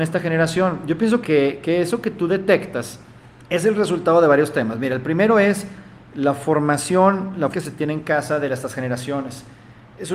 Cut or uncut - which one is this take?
cut